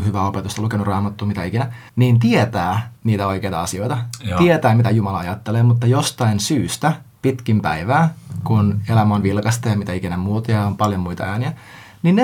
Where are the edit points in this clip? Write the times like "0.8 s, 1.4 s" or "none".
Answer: 1.9 s, 3.0 s